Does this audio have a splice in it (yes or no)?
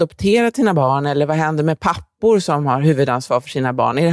no